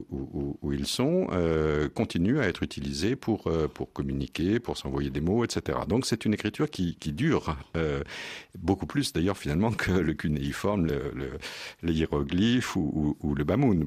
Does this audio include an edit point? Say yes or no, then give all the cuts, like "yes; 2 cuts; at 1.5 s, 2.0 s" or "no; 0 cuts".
no; 0 cuts